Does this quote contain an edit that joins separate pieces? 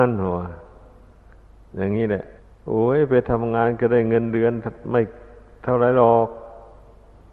yes; 1 cut; at 2.4 s

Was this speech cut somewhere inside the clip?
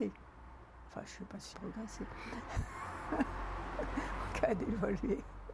yes; 2 cuts; at 1.5 s, 4.3 s

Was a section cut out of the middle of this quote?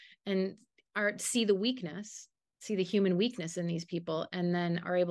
no; 0 cuts

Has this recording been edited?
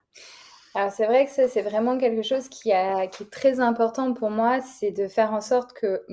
no; 0 cuts

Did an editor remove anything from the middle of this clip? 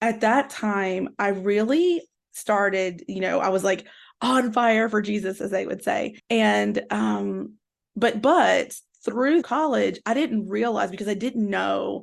yes; 2 cuts; at 6.2 s, 9.4 s

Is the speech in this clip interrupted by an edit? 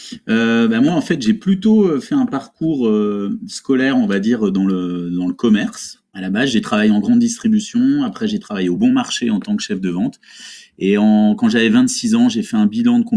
no; 0 cuts

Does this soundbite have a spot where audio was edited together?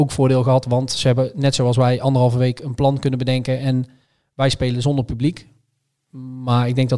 no; 0 cuts

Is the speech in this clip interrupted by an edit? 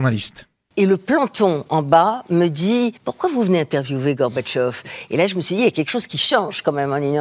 yes; 1 cut; at 3.0 s

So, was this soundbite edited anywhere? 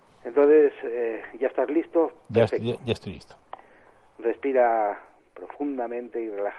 no; 0 cuts

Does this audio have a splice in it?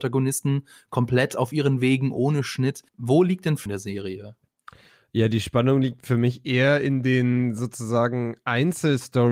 yes; 2 cuts; at 2.9 s, 3.7 s

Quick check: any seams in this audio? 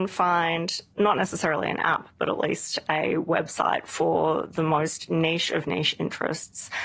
no; 0 cuts

